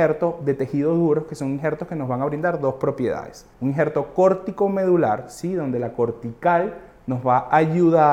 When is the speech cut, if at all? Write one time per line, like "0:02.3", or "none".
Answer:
0:03.5

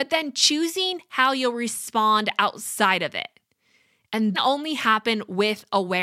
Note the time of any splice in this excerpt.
0:04.3

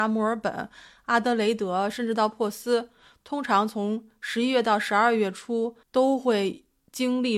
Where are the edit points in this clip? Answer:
0:05.8

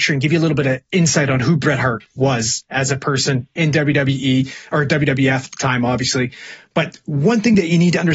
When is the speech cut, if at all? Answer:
none

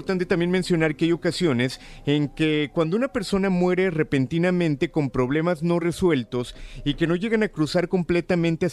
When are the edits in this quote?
none

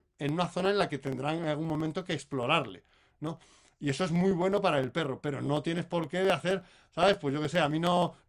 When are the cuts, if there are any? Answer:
none

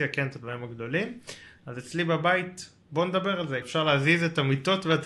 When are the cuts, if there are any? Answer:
0:03.6

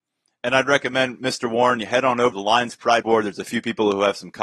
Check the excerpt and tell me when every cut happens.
0:02.3
0:03.0

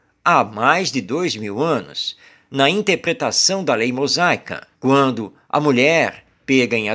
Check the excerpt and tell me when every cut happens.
0:04.7

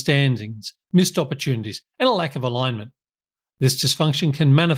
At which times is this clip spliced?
none

